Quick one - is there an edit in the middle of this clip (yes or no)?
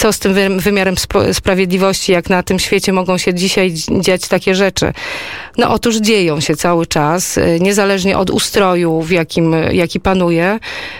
no